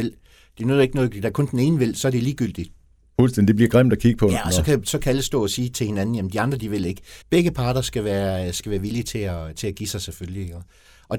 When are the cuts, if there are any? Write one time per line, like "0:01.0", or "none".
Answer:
0:07.2